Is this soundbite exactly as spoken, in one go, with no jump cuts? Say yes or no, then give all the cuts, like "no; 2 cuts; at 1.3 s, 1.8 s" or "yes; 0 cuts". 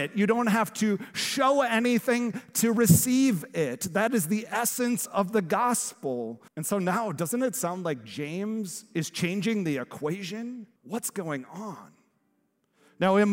no; 2 cuts; at 6.5 s, 10.8 s